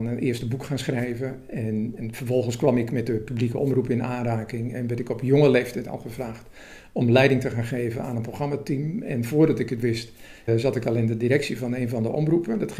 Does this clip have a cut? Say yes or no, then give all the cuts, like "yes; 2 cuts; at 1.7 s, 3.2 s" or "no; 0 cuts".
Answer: yes; 2 cuts; at 2.0 s, 10.5 s